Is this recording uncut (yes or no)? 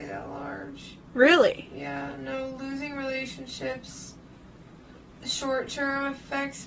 yes